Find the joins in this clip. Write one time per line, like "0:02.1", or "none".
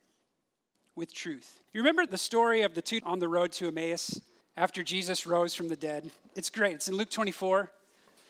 0:01.7
0:02.1
0:03.0
0:04.4